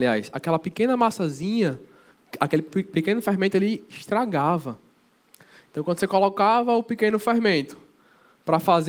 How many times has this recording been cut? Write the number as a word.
zero